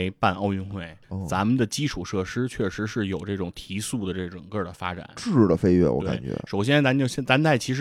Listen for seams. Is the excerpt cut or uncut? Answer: cut